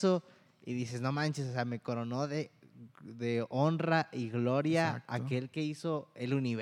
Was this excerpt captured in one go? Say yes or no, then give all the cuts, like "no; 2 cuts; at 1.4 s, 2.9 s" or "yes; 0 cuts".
yes; 0 cuts